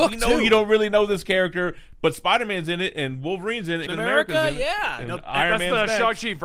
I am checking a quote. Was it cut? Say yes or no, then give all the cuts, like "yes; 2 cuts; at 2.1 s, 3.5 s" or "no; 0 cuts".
yes; 1 cut; at 3.9 s